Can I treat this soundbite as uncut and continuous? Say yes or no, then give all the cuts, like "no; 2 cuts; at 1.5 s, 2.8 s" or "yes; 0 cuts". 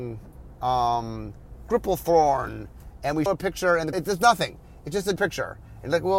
no; 3 cuts; at 3.3 s, 3.9 s, 5.2 s